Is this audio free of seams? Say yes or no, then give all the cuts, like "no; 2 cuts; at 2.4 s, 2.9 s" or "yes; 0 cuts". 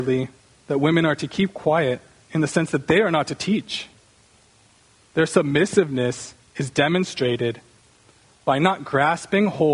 yes; 0 cuts